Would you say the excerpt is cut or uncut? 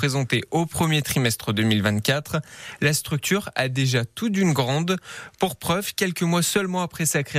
uncut